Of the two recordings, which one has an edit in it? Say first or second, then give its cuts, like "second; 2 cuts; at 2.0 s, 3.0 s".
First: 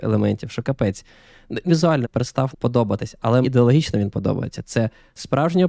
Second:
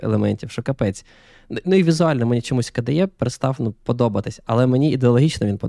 first; 4 cuts; at 1.7 s, 2.0 s, 2.5 s, 3.4 s